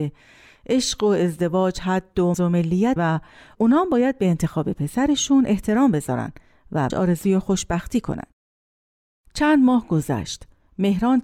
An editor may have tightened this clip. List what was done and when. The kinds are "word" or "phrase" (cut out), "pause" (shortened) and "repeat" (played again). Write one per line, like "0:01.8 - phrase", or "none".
0:02.3 - word
0:03.0 - word
0:06.9 - word